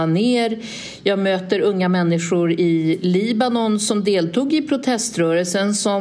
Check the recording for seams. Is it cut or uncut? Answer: uncut